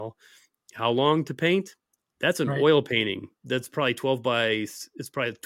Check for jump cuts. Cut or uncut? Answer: uncut